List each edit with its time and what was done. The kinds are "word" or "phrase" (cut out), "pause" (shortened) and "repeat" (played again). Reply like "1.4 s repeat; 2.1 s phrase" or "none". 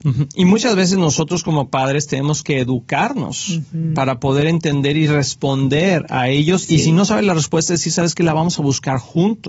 none